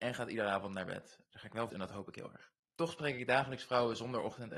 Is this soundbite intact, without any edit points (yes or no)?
no